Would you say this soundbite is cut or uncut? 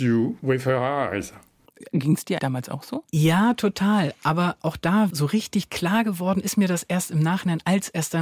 cut